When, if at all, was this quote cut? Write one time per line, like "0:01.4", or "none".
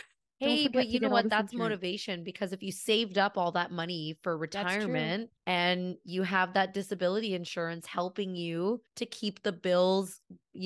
0:05.4
0:08.9